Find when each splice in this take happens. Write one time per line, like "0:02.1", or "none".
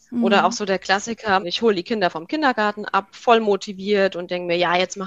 0:01.4